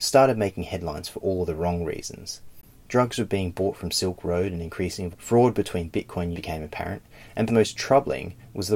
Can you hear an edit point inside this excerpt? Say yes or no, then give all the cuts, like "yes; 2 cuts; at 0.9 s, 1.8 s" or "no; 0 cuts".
yes; 3 cuts; at 5.1 s, 6.3 s, 7.5 s